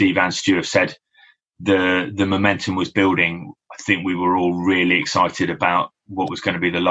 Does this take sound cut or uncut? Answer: uncut